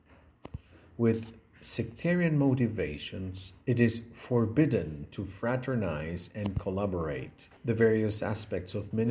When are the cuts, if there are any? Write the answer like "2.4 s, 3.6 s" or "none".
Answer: 3.6 s, 7.6 s